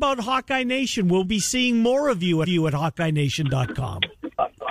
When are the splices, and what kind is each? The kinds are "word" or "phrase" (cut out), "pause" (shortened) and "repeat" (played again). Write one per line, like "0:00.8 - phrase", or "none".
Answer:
0:01.2 - word
0:02.4 - repeat